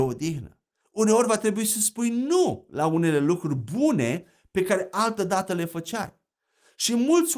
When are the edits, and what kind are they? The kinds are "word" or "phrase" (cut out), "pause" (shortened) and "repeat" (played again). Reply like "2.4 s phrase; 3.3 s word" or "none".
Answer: none

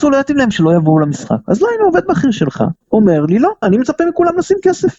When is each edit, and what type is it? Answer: 2.8 s pause; 3.6 s word

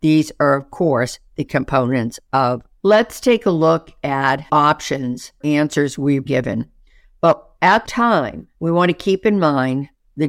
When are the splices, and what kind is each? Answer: 1.5 s word; 2.8 s word; 4.5 s word; 5.4 s word; 6.2 s word; 7.8 s phrase; 8.5 s pause

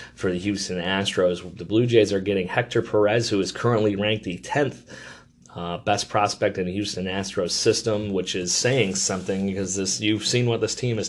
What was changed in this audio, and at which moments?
none

